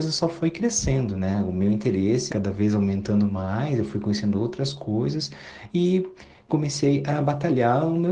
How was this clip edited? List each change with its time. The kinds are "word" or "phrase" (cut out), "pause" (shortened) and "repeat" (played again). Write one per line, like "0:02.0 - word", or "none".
0:02.3 - word